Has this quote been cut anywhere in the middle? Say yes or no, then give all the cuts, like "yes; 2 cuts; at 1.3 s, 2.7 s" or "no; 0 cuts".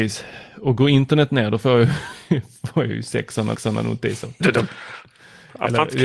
yes; 2 cuts; at 3.5 s, 4.4 s